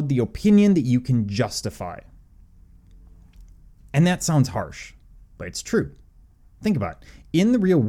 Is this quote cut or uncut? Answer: uncut